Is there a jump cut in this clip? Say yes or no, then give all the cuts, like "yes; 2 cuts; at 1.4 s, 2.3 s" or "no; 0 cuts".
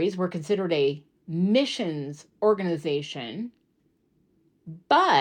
no; 0 cuts